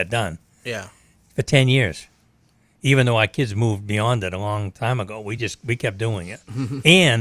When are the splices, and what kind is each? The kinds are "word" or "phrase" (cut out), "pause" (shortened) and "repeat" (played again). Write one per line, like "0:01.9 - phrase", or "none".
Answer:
none